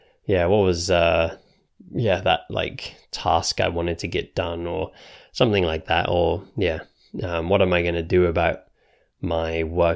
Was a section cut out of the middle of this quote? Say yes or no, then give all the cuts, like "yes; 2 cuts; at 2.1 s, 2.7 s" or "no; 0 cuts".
no; 0 cuts